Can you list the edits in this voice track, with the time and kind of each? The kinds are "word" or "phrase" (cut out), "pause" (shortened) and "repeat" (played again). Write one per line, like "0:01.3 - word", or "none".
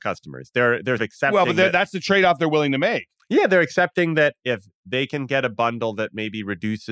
0:01.0 - word